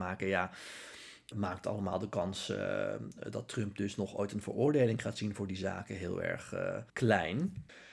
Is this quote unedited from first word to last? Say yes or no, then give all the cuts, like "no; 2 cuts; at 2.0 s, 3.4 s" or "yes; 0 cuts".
no; 2 cuts; at 1.3 s, 6.9 s